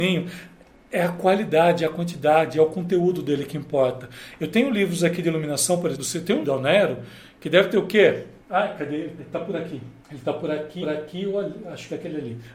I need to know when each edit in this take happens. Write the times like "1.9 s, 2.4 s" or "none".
5.9 s, 6.4 s, 8.4 s, 9.2 s, 10.0 s, 10.8 s